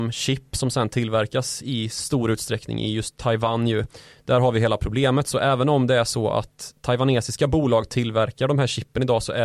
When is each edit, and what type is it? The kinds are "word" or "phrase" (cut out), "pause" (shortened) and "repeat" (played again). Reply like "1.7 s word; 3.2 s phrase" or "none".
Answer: none

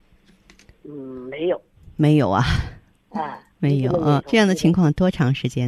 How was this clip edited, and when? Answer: 4.2 s word

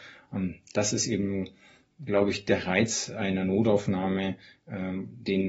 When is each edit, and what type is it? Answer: none

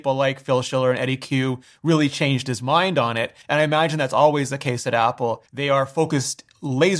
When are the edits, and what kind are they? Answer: 3.4 s pause; 5.5 s pause

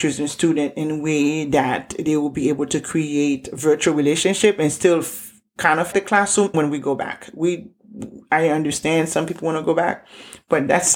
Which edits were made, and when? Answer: 5.9 s word; 6.5 s word

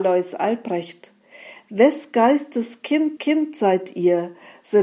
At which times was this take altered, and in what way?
3.2 s repeat

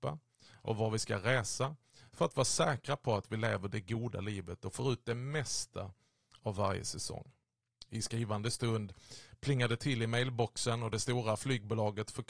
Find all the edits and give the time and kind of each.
none

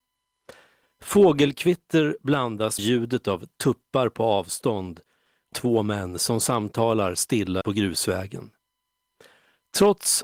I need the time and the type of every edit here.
2.8 s word; 5.5 s phrase; 7.6 s word

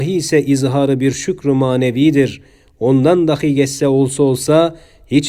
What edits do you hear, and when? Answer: none

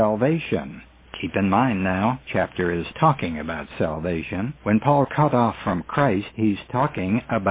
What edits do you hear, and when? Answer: 2.2 s word; 2.9 s word; 4.6 s pause; 5.0 s phrase

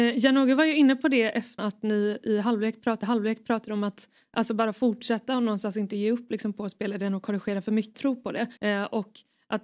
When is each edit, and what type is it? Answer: 1.6 s word; 3.0 s repeat; 7.9 s phrase; 8.6 s pause

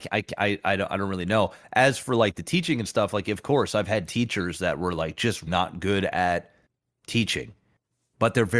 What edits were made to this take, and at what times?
5.5 s word

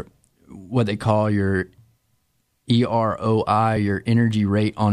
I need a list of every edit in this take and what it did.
none

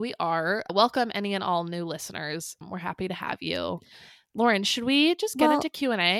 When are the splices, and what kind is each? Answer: none

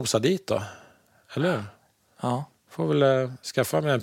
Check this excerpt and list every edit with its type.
none

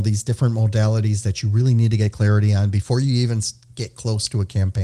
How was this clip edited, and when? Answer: none

